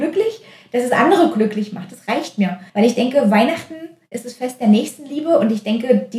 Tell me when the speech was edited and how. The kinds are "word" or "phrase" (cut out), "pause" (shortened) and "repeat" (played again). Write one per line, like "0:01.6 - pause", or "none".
0:02.7 - pause